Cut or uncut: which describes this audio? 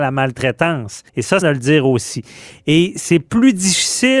cut